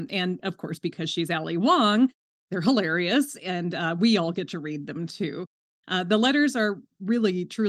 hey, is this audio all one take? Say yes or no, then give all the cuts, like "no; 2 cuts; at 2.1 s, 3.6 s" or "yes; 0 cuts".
yes; 0 cuts